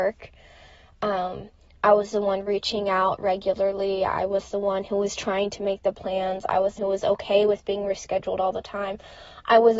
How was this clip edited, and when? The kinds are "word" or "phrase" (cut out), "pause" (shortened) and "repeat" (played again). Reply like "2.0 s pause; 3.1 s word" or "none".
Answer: 6.8 s word